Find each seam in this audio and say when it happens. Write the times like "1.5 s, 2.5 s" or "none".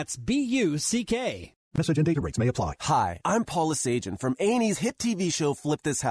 1.6 s